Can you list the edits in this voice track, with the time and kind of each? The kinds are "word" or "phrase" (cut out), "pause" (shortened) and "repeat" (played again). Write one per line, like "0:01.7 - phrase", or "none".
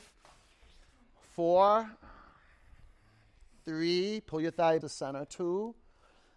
0:04.8 - word